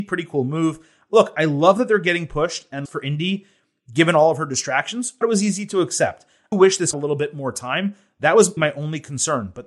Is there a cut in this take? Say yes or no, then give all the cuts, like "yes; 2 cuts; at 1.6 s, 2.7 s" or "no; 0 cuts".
yes; 5 cuts; at 2.8 s, 5.2 s, 6.5 s, 6.9 s, 8.6 s